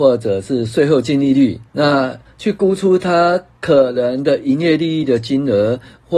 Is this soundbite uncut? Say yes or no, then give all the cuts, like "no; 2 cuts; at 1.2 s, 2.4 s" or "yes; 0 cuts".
no; 1 cut; at 1.7 s